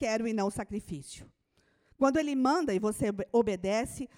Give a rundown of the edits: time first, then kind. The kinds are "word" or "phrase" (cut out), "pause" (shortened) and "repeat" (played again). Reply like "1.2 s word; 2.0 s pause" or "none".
none

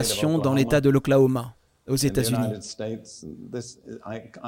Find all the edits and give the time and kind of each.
none

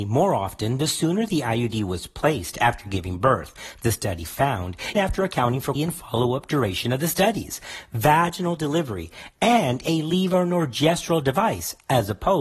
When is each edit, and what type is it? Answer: 4.9 s word; 5.8 s word

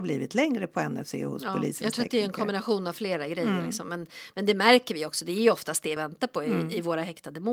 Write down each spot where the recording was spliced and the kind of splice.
6.0 s phrase

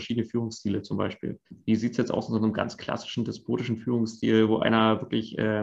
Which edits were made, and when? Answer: 1.4 s pause

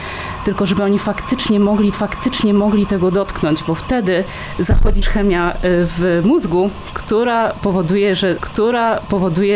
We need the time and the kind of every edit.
1.9 s repeat; 5.0 s word; 8.4 s repeat

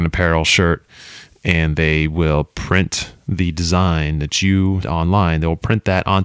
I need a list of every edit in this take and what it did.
4.8 s word

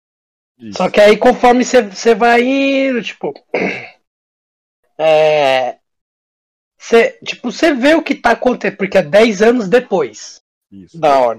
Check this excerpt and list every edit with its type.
none

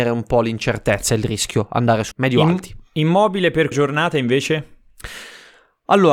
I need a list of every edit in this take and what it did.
2.1 s phrase; 3.7 s word

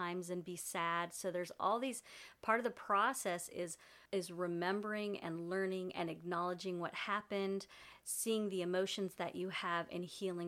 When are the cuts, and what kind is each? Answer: 4.1 s pause

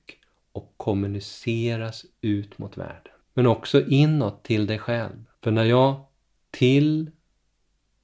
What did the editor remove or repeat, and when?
3.2 s pause; 5.3 s pause

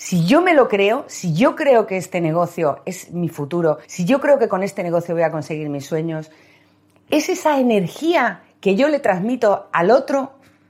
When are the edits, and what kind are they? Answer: 3.8 s pause

